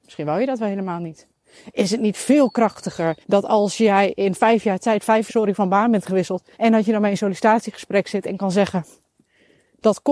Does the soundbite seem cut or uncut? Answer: cut